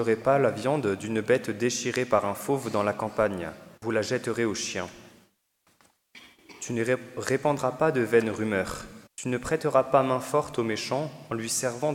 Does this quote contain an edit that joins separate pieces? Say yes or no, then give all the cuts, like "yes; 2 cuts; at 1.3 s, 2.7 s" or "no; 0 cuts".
yes; 2 cuts; at 3.8 s, 9.1 s